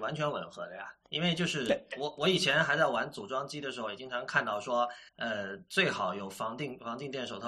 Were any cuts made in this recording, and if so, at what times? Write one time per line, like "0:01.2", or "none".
0:05.1